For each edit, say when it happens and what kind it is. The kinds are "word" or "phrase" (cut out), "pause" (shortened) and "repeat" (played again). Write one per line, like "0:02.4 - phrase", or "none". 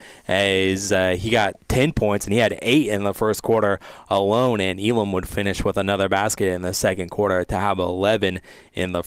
none

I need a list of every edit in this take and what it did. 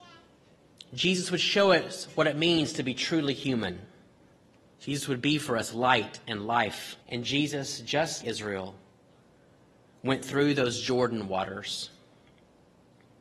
0:04.3 - pause
0:07.0 - pause
0:08.2 - word

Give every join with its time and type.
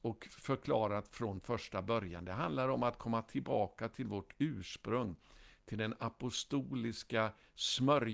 none

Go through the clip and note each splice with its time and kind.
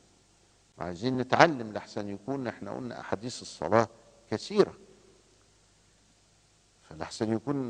none

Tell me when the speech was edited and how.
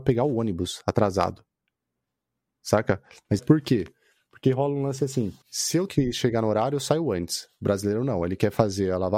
0:03.4 - word
0:05.4 - pause
0:05.9 - word

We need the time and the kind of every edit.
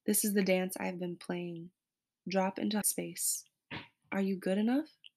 0:02.8 - word

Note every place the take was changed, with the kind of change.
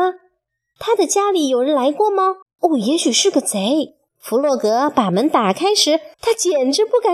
0:02.4 - pause
0:04.1 - pause
0:06.1 - pause

